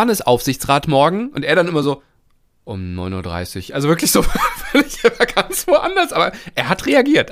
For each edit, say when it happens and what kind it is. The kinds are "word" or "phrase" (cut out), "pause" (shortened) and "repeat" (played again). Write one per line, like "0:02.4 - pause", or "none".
none